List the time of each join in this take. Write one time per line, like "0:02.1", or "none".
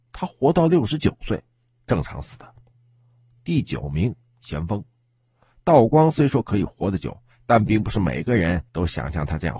0:08.7

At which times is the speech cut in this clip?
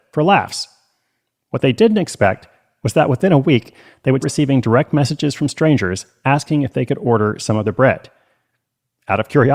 0:04.2

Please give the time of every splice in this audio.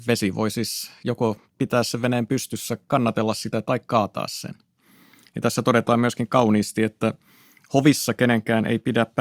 none

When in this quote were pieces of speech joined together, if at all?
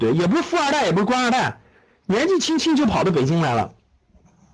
none

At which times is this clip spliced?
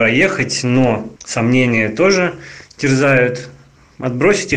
0:01.2

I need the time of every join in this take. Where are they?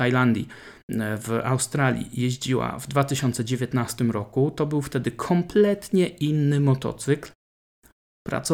none

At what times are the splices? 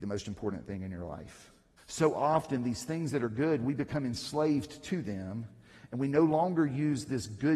0:01.8

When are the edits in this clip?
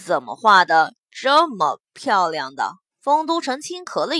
0:01.9
0:02.9

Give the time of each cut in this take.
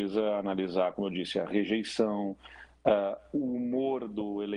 none

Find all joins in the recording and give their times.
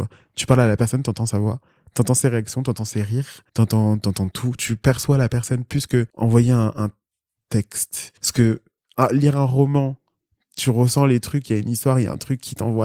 0:03.5
0:04.6
0:06.1
0:08.2

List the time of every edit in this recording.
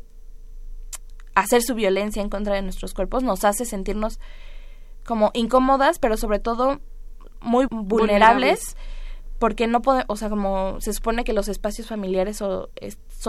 0:07.7

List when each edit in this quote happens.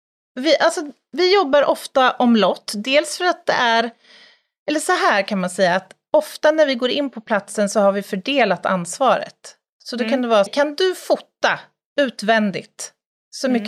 0:10.5

